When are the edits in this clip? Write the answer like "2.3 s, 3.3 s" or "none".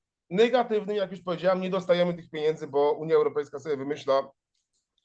none

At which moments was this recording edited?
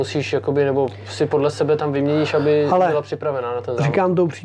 none

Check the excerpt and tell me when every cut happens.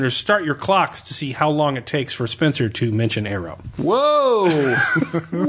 none

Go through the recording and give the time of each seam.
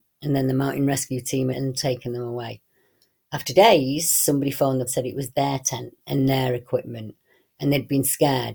1.5 s, 3.5 s, 4.9 s, 6.0 s

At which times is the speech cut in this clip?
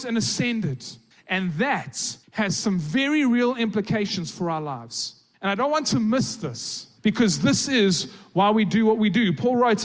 1.1 s, 2.2 s, 5.3 s, 7.0 s

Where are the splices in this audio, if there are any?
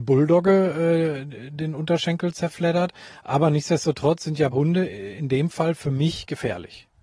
4.5 s

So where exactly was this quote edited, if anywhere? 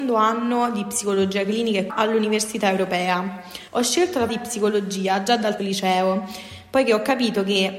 1.9 s, 3.7 s, 4.3 s, 5.6 s

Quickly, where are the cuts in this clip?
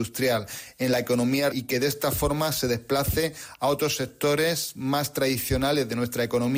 1.5 s

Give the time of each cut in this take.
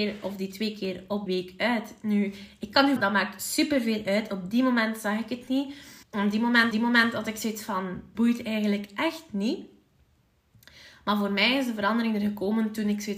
1.3 s, 3.0 s, 6.0 s, 6.7 s, 8.1 s

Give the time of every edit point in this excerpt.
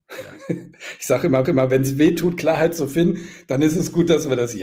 1.4 s

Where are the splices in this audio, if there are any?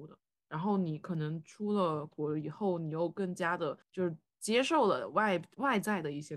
3.8 s

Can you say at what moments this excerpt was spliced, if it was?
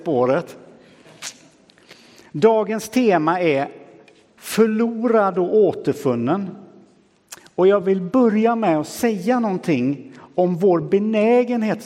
none

